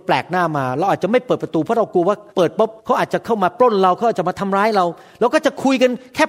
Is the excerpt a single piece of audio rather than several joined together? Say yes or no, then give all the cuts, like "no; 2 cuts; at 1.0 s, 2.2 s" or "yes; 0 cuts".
no; 2 cuts; at 2.3 s, 2.8 s